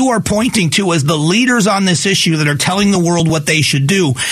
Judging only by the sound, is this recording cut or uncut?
uncut